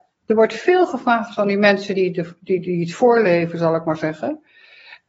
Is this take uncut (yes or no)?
yes